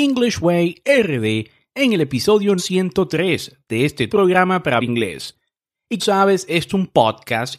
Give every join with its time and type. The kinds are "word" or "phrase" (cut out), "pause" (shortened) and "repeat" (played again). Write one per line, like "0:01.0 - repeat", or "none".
0:02.6 - word
0:04.1 - word
0:04.8 - word
0:06.0 - word
0:06.7 - word